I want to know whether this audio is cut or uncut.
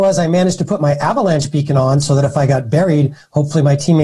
uncut